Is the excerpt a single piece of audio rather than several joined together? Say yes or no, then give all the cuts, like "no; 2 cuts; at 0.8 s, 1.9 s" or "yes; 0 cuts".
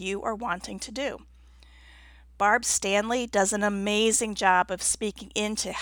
yes; 0 cuts